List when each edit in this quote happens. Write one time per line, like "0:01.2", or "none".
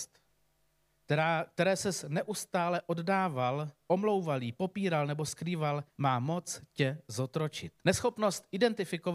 0:05.9
0:07.8